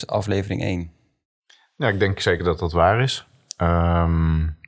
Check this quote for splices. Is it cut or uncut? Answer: uncut